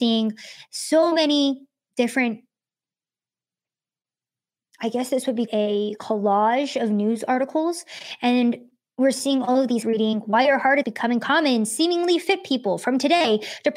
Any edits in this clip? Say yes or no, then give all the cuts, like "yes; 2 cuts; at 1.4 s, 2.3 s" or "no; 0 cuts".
yes; 3 cuts; at 5.5 s, 9.8 s, 10.8 s